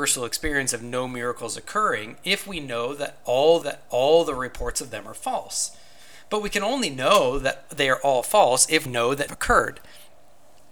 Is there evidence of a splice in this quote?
yes; 3 cuts; at 3.6 s, 8.9 s, 9.3 s

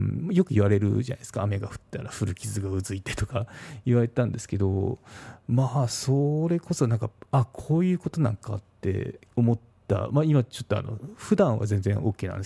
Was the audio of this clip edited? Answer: yes; 1 cut; at 9.3 s

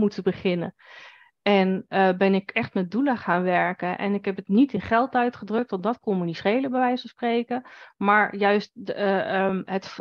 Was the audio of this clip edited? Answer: no; 0 cuts

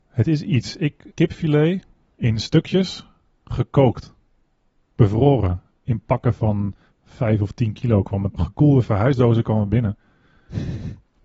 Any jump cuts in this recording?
yes; 2 cuts; at 1.1 s, 8.3 s

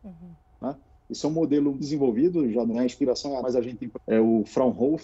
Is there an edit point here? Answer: yes; 4 cuts; at 1.8 s, 2.7 s, 3.4 s, 3.9 s

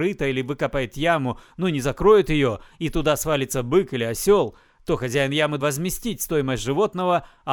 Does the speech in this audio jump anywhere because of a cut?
yes; 1 cut; at 5.6 s

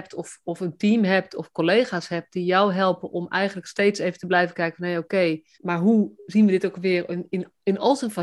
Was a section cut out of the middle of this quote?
yes; 1 cut; at 5.5 s

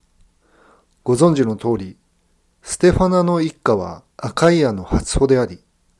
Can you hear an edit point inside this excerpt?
yes; 1 cut; at 4.1 s

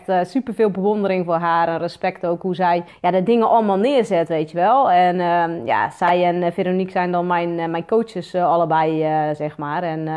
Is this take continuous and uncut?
no; 1 cut; at 2.9 s

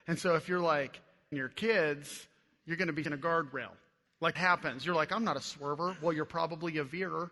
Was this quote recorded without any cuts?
no; 3 cuts; at 1.3 s, 3.0 s, 4.3 s

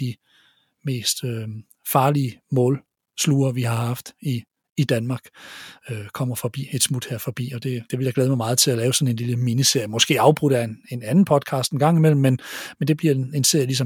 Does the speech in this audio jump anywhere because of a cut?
no; 0 cuts

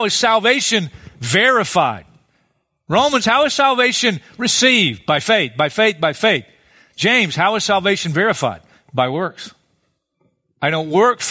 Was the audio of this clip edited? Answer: no; 0 cuts

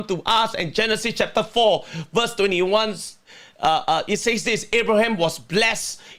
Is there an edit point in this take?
no; 0 cuts

